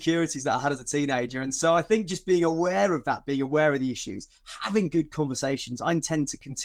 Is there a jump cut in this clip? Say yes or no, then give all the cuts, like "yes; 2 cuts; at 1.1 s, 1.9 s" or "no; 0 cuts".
no; 0 cuts